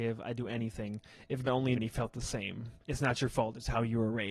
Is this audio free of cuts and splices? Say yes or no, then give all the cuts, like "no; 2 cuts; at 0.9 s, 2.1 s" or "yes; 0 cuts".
no; 3 cuts; at 1.4 s, 1.8 s, 2.8 s